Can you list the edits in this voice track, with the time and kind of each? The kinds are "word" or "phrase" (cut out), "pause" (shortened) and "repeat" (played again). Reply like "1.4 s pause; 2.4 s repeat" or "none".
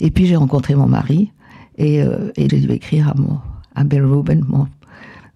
2.5 s word

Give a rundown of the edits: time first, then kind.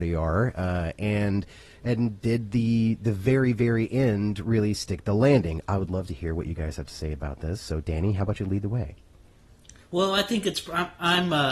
none

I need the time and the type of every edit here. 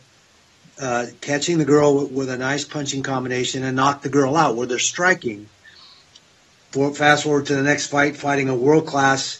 none

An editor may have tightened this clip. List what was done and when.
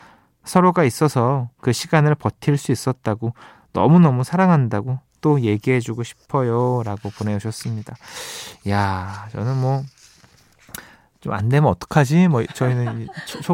none

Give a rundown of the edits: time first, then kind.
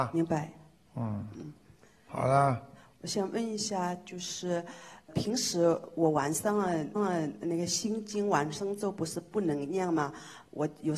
5.1 s word; 7.0 s repeat

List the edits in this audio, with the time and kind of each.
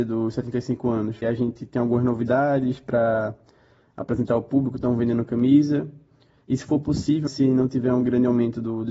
1.2 s word; 7.3 s word

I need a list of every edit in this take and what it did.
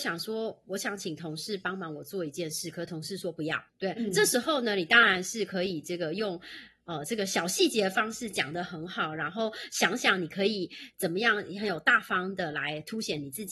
3.7 s pause

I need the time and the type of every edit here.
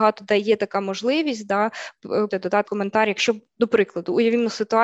2.3 s phrase; 2.6 s word

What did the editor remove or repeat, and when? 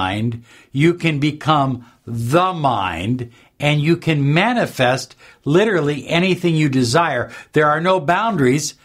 none

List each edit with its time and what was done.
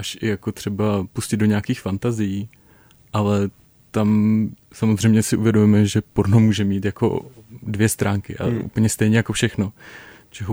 none

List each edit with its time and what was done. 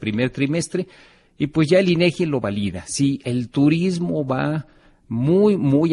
none

